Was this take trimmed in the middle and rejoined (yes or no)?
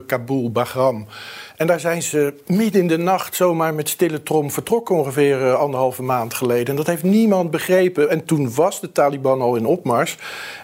no